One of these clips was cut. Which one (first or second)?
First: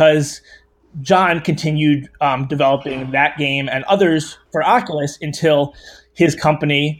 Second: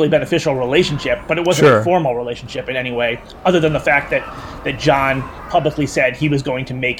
first